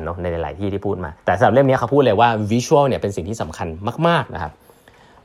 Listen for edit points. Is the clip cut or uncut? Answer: cut